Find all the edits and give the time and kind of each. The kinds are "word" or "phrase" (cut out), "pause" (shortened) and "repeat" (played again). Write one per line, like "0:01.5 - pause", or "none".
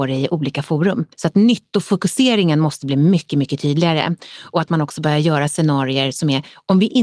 0:01.1 - pause

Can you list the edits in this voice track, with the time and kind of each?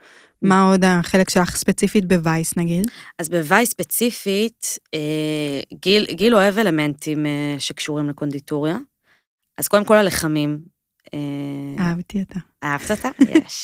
none

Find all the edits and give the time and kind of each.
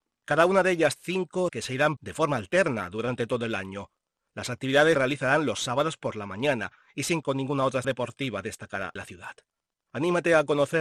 0:01.0 - word
0:01.5 - word
0:02.0 - word
0:04.9 - word
0:07.2 - word
0:07.8 - word
0:09.0 - word

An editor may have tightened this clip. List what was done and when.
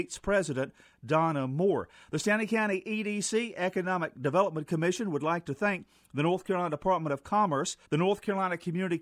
0:07.8 - pause

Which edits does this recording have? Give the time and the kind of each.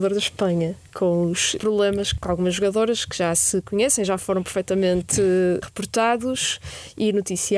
none

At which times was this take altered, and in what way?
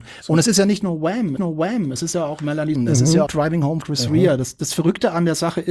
0:01.4 - repeat
0:02.8 - word
0:03.3 - word
0:03.8 - phrase

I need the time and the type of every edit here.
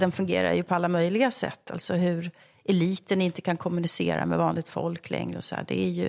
none

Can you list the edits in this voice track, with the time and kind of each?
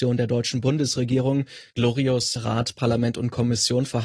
0:02.4 - phrase

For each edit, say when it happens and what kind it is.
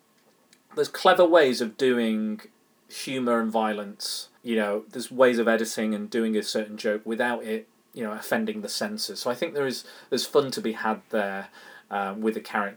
0:02.7 - pause
0:04.4 - pause

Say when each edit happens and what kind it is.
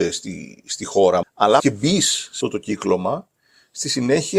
0:01.2 - word
0:01.6 - word
0:02.4 - word

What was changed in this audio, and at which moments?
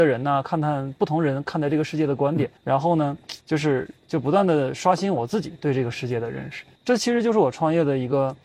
0:02.6 - pause
0:03.4 - pause
0:04.0 - pause
0:06.8 - pause

